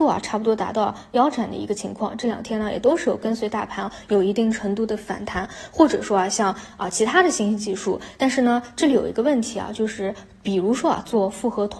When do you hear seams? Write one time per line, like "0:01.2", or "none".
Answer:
none